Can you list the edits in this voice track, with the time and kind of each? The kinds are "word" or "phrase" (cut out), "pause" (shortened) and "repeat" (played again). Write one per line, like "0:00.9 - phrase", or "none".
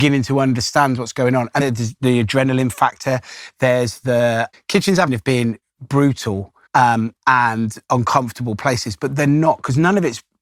0:01.6 - word
0:04.5 - word
0:05.1 - phrase
0:06.7 - pause